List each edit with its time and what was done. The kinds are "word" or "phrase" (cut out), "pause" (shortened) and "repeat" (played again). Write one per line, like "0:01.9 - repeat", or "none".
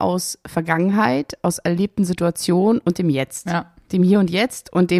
none